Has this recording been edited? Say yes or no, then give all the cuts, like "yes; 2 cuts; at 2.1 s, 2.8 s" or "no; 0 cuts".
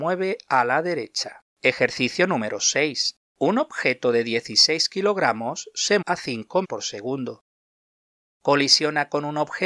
yes; 4 cuts; at 1.5 s, 3.3 s, 6.0 s, 6.6 s